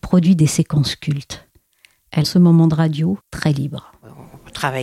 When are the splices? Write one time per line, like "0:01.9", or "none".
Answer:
0:02.2
0:03.2